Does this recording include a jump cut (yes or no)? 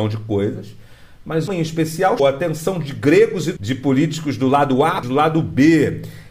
yes